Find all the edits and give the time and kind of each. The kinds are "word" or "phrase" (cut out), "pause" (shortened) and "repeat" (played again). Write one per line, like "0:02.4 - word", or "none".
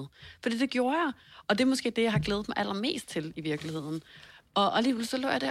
none